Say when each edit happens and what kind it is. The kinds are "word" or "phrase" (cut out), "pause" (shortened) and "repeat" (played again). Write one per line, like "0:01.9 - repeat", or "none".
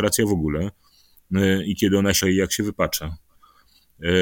0:02.2 - word